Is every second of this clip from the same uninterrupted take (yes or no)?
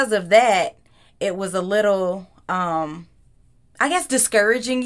yes